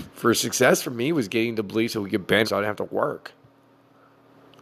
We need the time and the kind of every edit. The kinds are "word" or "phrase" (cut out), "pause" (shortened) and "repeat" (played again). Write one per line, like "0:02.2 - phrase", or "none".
0:02.4 - word

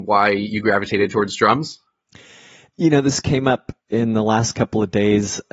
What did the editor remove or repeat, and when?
0:03.9 - word

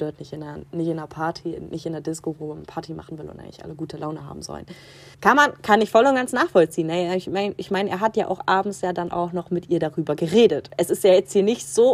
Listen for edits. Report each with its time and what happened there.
0:05.1 - pause

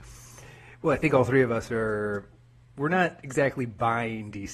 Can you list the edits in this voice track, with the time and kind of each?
none

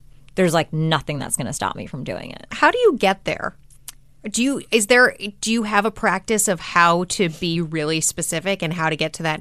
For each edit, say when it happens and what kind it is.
none

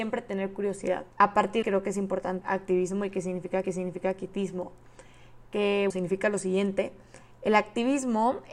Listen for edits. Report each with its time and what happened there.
0:01.1 - pause
0:01.6 - phrase
0:02.4 - phrase
0:03.6 - repeat
0:05.9 - word

